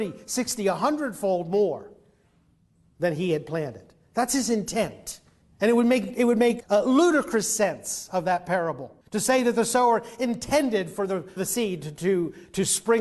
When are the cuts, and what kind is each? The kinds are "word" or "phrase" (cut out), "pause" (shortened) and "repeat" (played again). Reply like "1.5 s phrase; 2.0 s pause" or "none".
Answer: 5.4 s pause; 6.6 s word; 9.0 s pause; 11.4 s word